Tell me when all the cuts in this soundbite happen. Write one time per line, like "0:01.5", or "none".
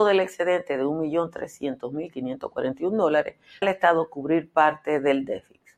0:03.6